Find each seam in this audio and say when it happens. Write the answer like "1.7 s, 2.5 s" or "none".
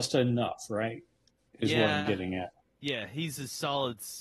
none